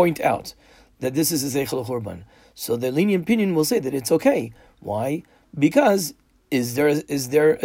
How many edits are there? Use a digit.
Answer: 0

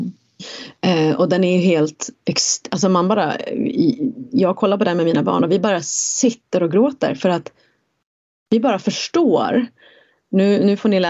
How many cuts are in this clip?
0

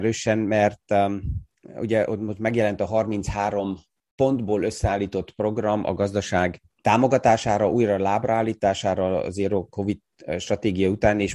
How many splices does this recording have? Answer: 2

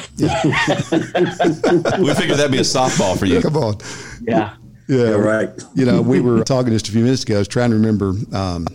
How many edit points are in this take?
2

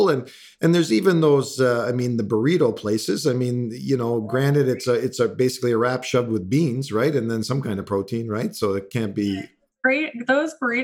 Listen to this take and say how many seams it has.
0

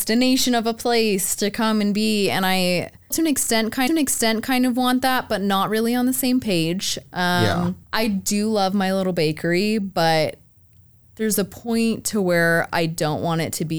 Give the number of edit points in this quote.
3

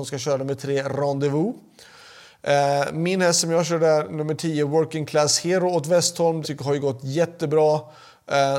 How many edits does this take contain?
1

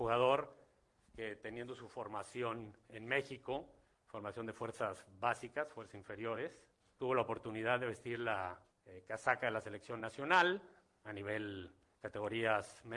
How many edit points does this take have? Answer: 0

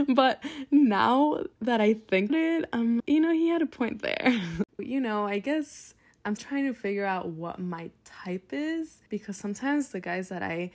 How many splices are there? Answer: 6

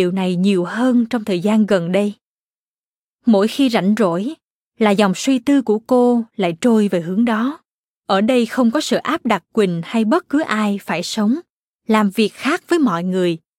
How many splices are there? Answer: 1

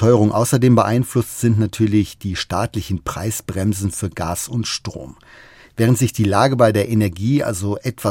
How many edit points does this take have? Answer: 0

